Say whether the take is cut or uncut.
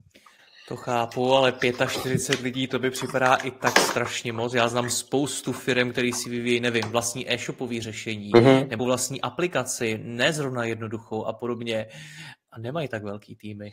cut